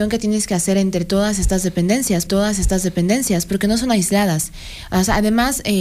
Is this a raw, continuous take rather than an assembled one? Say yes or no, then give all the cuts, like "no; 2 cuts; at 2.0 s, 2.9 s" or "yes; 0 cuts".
no; 1 cut; at 2.3 s